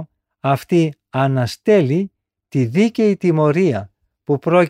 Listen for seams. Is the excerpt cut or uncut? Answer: uncut